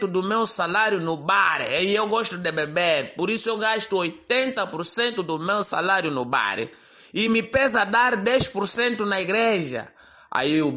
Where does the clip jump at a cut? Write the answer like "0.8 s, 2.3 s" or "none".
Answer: none